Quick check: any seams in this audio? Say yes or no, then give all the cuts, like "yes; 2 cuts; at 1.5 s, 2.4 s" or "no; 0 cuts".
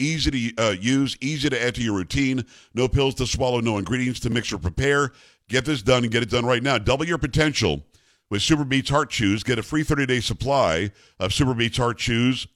no; 0 cuts